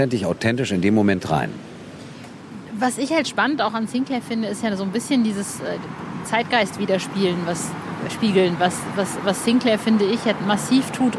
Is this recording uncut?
yes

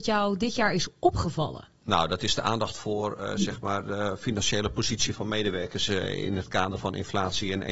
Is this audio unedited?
no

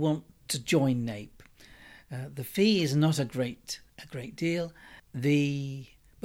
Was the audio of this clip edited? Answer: yes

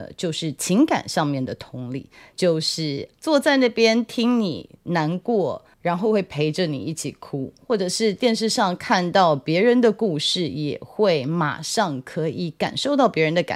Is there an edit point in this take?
no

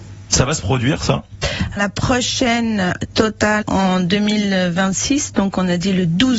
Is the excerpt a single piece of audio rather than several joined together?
no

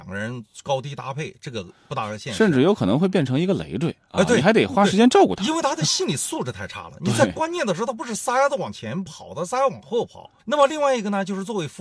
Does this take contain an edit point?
yes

